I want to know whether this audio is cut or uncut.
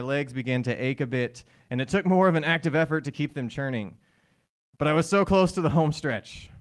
uncut